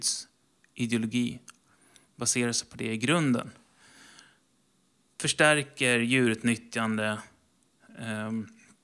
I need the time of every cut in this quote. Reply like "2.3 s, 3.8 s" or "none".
none